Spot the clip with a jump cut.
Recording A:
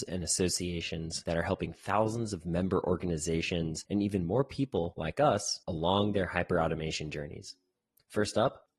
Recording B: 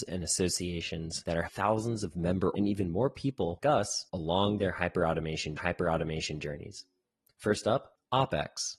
B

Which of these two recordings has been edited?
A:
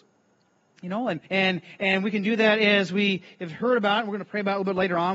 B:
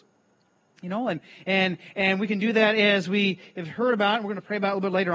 A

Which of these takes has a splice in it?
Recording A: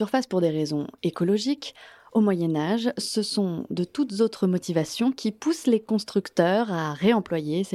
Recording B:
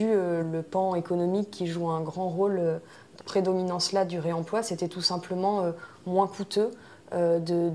B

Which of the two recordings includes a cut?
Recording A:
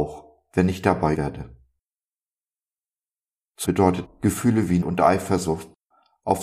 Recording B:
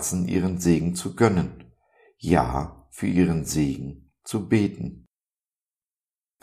A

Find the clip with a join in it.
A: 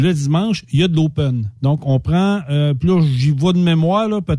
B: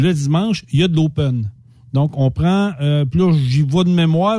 A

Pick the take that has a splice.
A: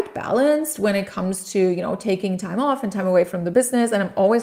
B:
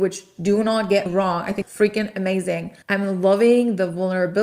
B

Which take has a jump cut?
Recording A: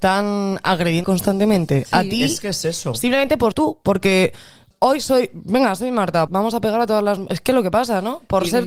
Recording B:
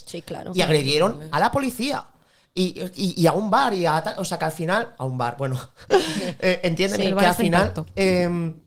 A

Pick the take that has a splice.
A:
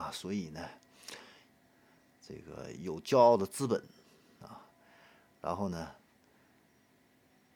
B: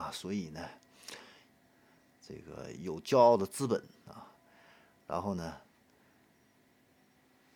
B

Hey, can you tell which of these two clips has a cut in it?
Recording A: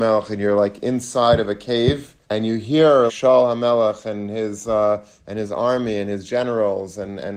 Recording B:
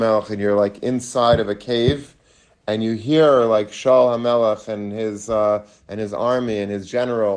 A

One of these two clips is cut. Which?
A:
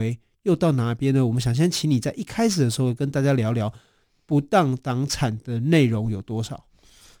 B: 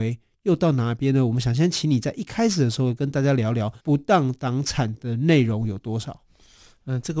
B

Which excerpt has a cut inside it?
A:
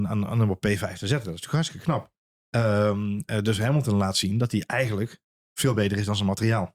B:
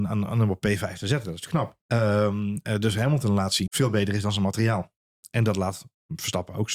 B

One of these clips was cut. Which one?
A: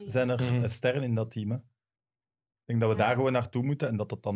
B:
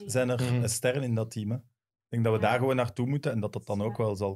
B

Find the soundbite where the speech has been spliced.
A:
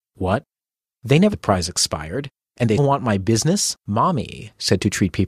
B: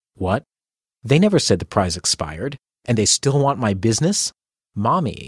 A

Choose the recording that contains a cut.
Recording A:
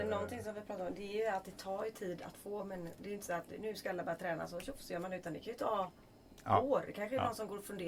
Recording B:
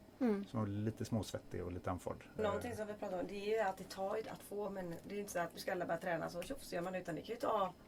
B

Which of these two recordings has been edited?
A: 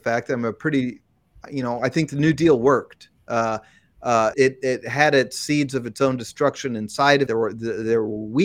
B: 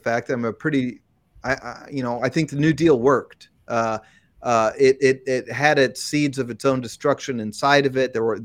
A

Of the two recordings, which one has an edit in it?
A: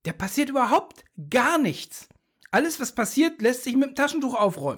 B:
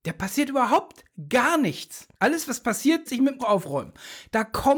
B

